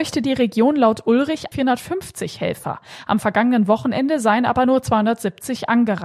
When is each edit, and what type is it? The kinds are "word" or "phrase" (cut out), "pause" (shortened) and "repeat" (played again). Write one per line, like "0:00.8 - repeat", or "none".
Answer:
0:01.5 - word